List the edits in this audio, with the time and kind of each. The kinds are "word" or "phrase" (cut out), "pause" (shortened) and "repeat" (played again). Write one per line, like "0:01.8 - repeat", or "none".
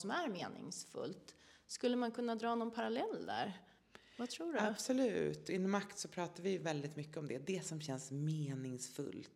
none